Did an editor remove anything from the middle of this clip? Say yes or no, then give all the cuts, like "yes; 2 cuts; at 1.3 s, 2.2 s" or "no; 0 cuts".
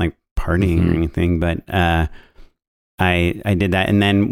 no; 0 cuts